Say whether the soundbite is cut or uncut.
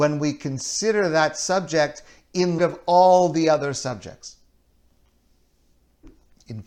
cut